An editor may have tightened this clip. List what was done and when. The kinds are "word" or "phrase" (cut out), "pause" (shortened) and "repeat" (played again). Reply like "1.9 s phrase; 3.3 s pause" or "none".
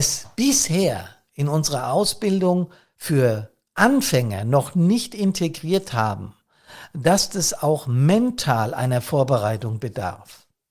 none